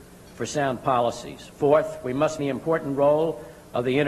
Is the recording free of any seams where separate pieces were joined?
no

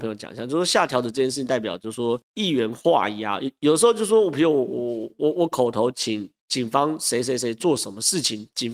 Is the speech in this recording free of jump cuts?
no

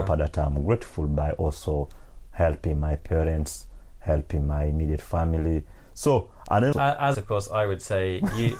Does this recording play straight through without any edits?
no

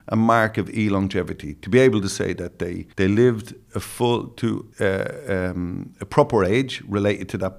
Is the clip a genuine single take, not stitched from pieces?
no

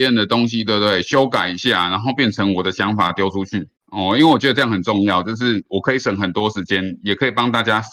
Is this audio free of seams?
no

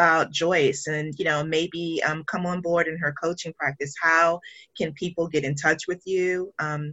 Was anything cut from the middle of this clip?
no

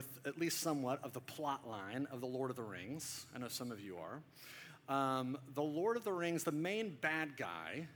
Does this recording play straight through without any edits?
yes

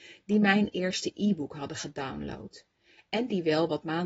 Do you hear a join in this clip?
no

